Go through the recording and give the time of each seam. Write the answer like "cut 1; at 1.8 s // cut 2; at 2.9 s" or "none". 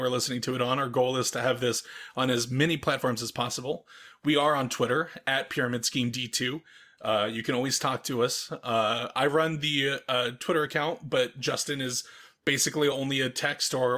none